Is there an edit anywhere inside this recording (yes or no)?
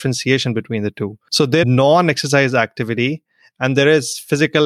yes